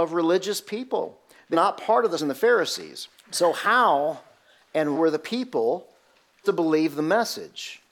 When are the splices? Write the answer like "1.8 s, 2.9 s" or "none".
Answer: 1.5 s, 2.2 s, 3.2 s, 4.9 s, 6.4 s